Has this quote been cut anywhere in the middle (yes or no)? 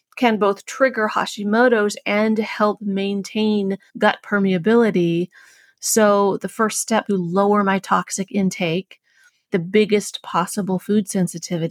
yes